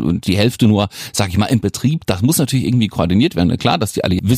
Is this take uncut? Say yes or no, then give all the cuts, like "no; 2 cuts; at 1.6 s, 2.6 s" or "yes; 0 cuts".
yes; 0 cuts